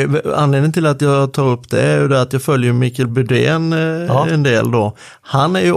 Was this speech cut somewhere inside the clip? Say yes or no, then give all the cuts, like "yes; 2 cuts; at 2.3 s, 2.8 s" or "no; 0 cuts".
no; 0 cuts